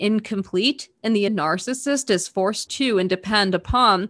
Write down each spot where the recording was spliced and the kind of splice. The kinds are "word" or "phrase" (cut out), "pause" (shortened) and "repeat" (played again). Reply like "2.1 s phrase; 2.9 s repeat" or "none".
1.3 s word; 2.7 s phrase